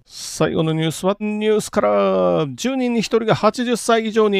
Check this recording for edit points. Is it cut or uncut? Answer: cut